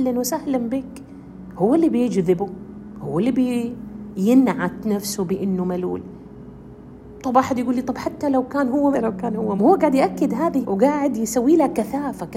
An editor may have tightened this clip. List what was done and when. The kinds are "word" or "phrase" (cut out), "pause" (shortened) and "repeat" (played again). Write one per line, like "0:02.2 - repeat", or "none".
0:08.9 - phrase
0:09.6 - word
0:10.6 - word